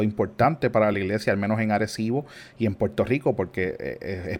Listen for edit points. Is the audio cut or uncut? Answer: uncut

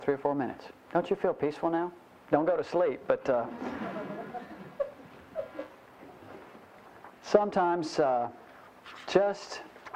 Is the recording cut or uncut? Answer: uncut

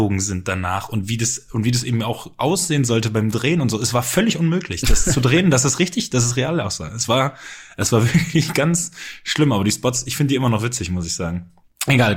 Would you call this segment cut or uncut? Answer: uncut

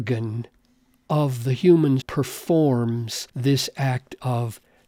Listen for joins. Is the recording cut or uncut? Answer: cut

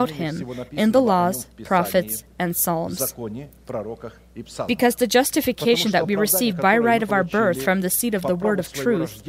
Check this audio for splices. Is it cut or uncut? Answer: uncut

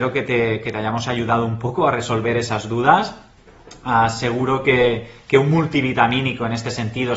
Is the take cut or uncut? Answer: uncut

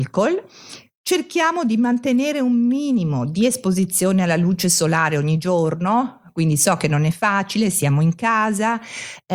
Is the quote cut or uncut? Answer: uncut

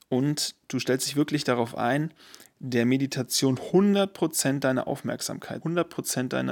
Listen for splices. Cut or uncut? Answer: cut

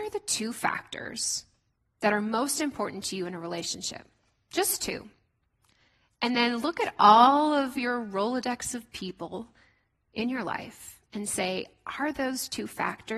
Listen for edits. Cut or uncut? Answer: uncut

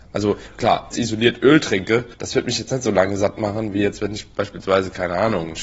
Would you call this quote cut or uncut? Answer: cut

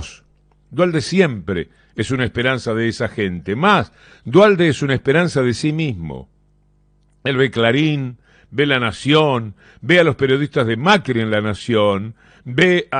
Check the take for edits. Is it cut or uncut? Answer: uncut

